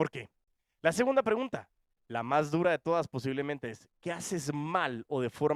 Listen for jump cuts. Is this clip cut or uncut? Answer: uncut